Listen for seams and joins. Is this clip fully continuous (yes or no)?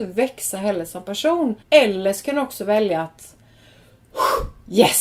no